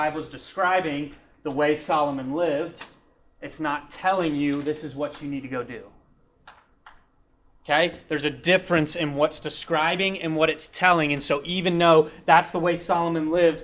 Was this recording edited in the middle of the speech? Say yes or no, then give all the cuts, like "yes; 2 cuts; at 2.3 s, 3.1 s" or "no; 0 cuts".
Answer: no; 0 cuts